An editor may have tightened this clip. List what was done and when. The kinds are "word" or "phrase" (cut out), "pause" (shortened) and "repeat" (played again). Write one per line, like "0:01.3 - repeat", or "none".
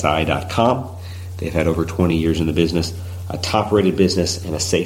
none